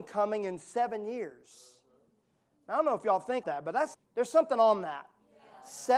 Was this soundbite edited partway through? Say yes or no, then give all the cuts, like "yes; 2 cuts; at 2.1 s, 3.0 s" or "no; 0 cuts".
yes; 2 cuts; at 3.4 s, 3.9 s